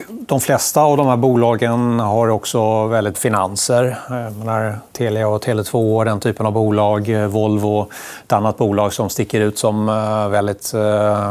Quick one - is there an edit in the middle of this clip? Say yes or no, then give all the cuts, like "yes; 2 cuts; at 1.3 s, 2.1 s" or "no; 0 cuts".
yes; 1 cut; at 3.1 s